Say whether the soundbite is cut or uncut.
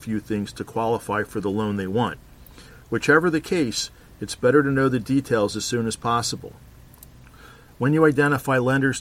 uncut